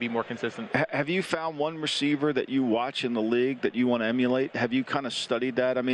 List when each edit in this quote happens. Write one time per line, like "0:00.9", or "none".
none